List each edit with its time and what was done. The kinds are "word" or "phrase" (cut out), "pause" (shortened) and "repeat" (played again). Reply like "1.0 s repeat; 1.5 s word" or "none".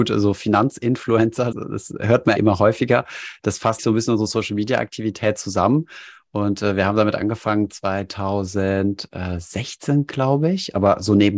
1.5 s word; 2.4 s word; 3.8 s word